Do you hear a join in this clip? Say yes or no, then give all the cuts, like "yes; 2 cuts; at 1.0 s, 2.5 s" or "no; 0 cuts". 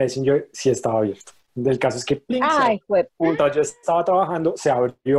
no; 0 cuts